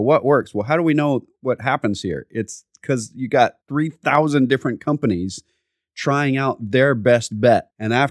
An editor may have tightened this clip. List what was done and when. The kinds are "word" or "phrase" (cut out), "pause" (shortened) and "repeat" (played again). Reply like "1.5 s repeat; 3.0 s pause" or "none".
3.6 s pause